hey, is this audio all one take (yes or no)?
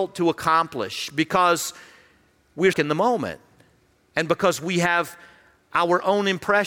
no